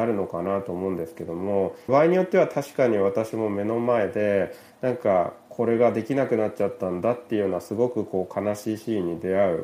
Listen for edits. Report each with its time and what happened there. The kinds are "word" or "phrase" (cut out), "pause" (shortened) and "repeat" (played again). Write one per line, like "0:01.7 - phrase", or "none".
0:01.9 - phrase